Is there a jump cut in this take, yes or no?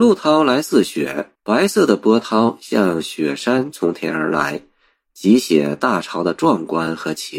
yes